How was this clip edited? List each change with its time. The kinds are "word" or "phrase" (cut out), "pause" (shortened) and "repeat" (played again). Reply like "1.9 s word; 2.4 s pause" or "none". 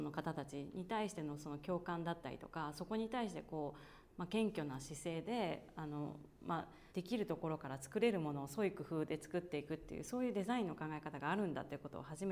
6.9 s pause